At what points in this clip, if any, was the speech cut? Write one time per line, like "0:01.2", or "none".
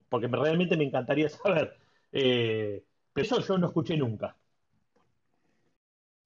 0:03.2